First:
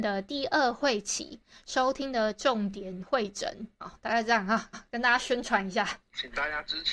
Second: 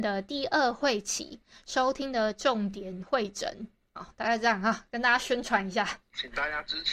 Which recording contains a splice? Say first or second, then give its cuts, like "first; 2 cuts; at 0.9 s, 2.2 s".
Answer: first; 2 cuts; at 3.7 s, 4.7 s